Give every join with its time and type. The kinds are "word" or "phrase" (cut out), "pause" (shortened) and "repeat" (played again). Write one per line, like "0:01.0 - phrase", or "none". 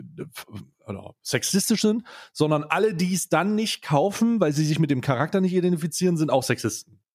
none